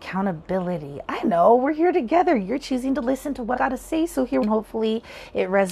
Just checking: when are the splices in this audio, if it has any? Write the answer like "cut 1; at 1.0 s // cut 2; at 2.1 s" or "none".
cut 1; at 1.2 s // cut 2; at 3.6 s // cut 3; at 4.4 s